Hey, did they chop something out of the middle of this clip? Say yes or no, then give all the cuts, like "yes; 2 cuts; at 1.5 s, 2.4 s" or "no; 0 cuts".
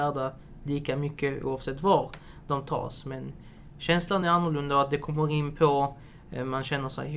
no; 0 cuts